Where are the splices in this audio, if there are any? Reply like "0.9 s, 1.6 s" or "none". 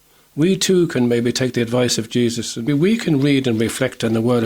2.7 s